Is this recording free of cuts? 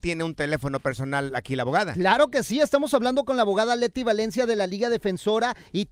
yes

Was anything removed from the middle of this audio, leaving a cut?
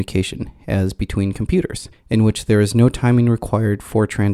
yes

